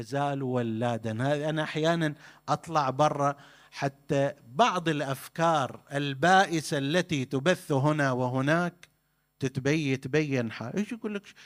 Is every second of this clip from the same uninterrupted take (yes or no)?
yes